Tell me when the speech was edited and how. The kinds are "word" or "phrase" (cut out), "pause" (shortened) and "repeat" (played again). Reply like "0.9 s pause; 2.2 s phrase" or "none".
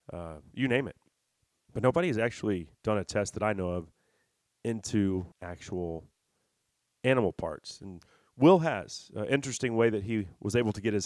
1.1 s pause; 2.7 s pause; 5.3 s pause